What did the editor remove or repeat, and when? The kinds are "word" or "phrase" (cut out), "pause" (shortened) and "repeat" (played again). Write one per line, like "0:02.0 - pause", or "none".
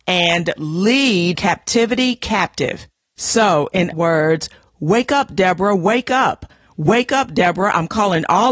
0:01.4 - word
0:03.9 - word